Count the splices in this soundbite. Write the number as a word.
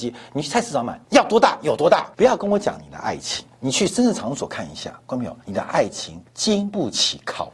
five